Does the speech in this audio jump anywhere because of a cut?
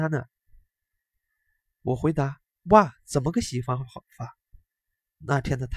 yes; 1 cut; at 4.5 s

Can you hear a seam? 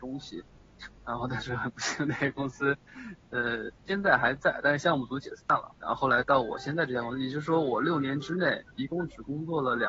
yes; 3 cuts; at 3.8 s, 5.8 s, 8.7 s

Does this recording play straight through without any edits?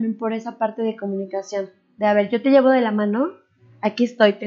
yes; 0 cuts

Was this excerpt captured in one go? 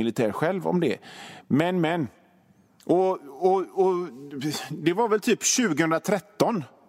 yes; 0 cuts

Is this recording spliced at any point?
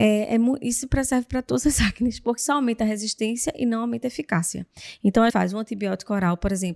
yes; 2 cuts; at 2.4 s, 5.3 s

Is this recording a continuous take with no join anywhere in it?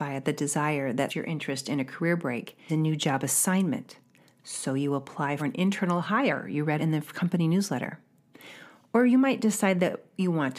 no; 4 cuts; at 1.1 s, 2.7 s, 5.4 s, 6.8 s

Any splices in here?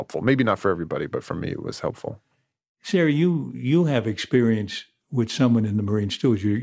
no; 0 cuts

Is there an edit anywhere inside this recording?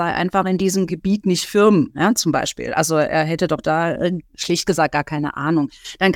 no; 0 cuts

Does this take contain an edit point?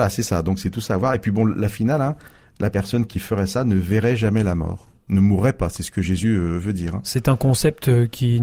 no; 0 cuts

